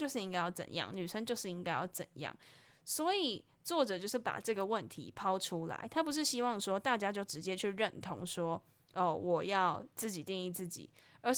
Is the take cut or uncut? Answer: uncut